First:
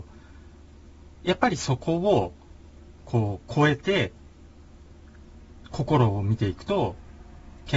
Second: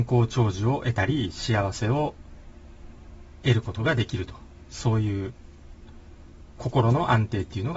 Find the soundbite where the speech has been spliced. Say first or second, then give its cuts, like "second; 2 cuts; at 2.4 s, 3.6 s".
first; 1 cut; at 3.0 s